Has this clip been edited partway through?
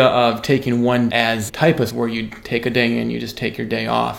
yes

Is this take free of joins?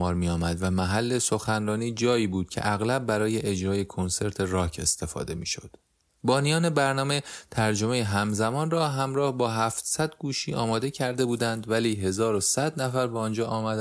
yes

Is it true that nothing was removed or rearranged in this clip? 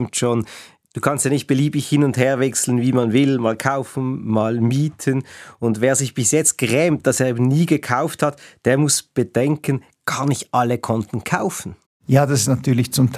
yes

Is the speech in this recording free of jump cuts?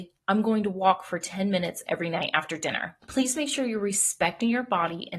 yes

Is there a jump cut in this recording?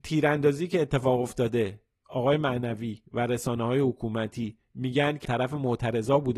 yes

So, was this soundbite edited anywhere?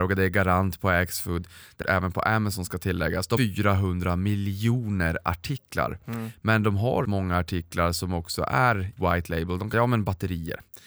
yes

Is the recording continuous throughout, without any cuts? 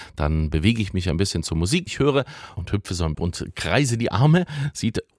no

